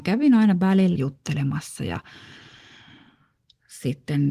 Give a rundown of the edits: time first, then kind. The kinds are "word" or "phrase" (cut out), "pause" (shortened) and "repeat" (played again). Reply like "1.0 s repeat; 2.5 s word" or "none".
1.0 s phrase